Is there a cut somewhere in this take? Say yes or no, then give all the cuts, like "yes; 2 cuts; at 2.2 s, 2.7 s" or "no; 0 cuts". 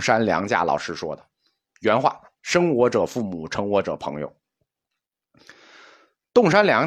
no; 0 cuts